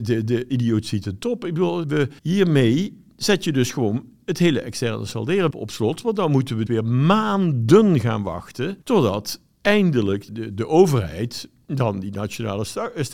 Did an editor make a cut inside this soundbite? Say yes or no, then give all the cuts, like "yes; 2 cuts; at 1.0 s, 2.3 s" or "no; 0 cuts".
yes; 6 cuts; at 1.8 s, 2.2 s, 5.5 s, 6.7 s, 8.8 s, 10.3 s